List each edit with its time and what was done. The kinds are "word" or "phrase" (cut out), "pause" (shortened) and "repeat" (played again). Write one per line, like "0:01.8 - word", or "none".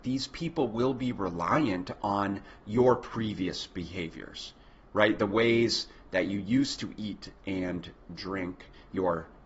none